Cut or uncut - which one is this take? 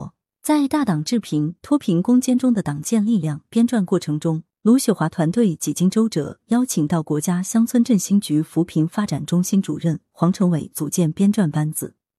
cut